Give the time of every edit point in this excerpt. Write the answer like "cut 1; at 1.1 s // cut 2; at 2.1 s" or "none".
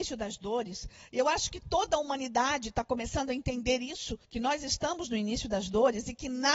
cut 1; at 4.2 s

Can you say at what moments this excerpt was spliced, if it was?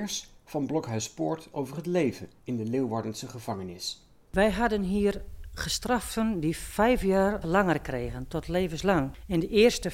cut 1; at 1.5 s // cut 2; at 2.4 s // cut 3; at 7.4 s

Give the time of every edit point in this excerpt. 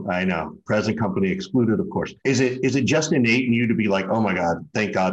cut 1; at 2.2 s

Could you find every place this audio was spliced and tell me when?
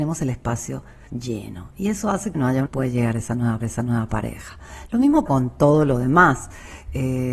cut 1; at 1.1 s // cut 2; at 2.3 s // cut 3; at 2.7 s // cut 4; at 3.6 s // cut 5; at 5.3 s

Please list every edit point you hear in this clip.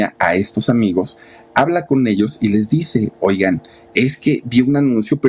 none

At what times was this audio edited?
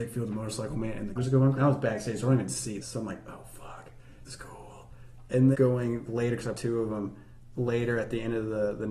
cut 1; at 1.2 s // cut 2; at 1.6 s // cut 3; at 2.8 s // cut 4; at 4.3 s // cut 5; at 5.5 s // cut 6; at 6.1 s // cut 7; at 6.5 s

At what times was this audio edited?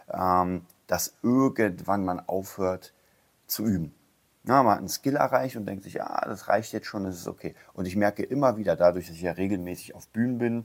none

